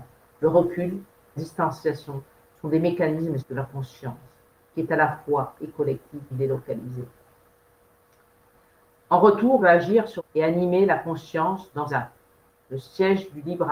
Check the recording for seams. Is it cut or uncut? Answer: cut